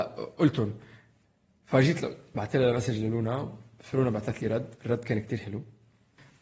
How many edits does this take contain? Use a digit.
0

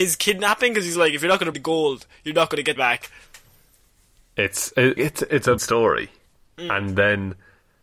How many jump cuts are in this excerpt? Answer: 4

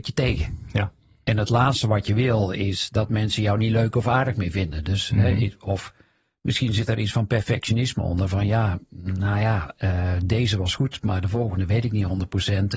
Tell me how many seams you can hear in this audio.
0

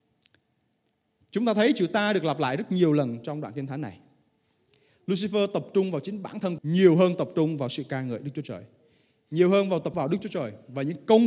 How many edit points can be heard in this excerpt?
2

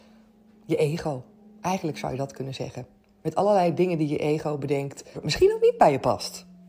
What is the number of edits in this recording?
1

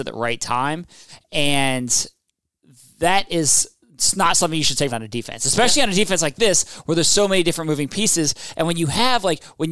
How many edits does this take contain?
1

